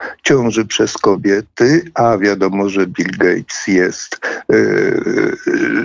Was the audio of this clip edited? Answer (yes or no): no